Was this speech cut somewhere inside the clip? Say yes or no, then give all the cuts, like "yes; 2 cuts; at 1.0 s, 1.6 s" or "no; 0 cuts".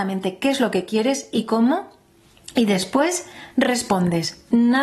no; 0 cuts